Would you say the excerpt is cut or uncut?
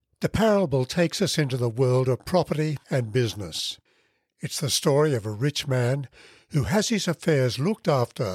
uncut